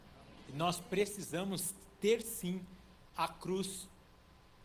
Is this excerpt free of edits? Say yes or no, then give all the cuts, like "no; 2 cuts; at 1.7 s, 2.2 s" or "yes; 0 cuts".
yes; 0 cuts